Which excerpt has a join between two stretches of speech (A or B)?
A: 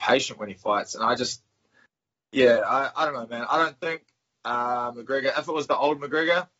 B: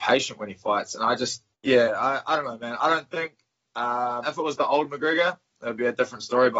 B